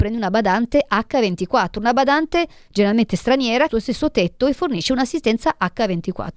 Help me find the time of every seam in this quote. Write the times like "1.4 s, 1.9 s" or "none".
3.7 s